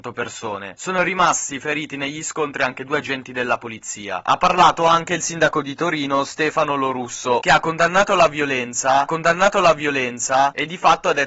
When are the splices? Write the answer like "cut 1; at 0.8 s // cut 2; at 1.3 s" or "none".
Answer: cut 1; at 9.1 s